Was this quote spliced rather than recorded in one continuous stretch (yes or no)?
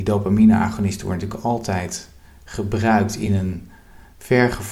no